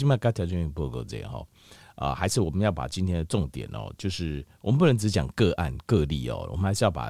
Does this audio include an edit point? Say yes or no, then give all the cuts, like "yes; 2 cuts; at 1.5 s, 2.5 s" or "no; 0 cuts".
no; 0 cuts